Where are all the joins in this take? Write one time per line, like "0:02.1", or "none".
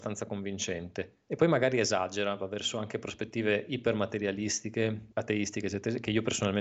0:05.1

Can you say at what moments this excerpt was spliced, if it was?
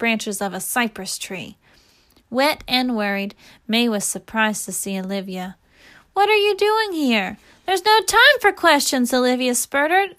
none

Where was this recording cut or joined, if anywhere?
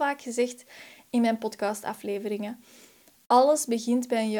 none

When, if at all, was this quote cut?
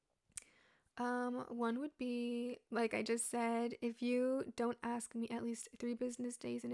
none

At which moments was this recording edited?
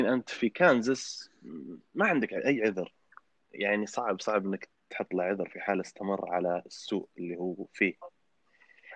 none

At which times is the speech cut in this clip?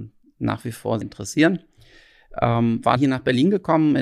0:01.0
0:03.0

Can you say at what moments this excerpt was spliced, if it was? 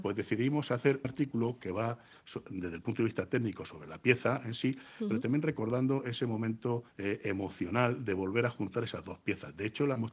0:01.0
0:06.9

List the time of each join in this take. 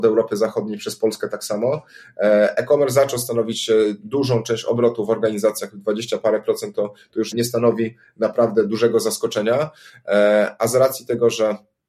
0:07.3

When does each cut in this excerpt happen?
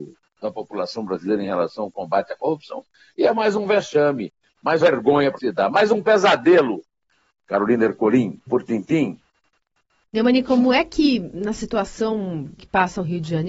0:04.8
0:05.4
0:08.5
0:12.6

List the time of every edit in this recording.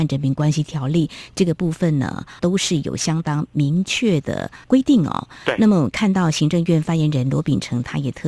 0:02.4
0:04.6

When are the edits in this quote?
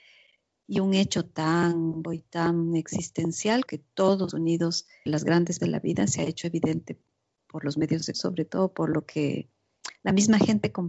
0:02.0
0:03.7
0:04.3
0:05.1
0:05.6
0:08.1

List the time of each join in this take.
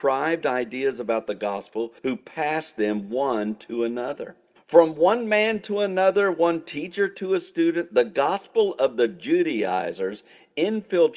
0:02.0
0:04.6

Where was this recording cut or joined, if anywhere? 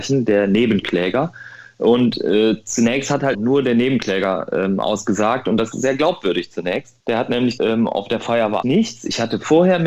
0:03.3
0:05.7
0:07.0
0:07.6
0:08.6

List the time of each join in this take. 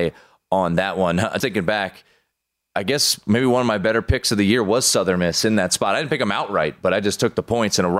0:01.4

